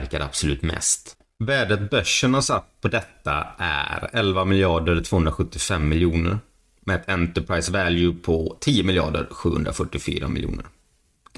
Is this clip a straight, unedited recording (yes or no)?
yes